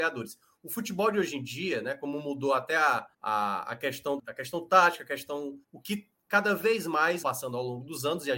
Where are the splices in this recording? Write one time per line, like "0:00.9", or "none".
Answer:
0:03.1
0:04.2
0:05.6
0:07.2